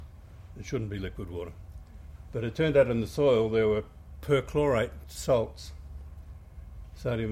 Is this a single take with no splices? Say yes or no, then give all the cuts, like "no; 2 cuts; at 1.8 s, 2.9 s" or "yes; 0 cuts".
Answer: yes; 0 cuts